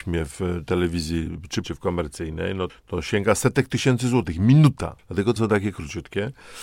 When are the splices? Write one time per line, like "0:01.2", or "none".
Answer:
0:01.6
0:02.7
0:05.0
0:05.4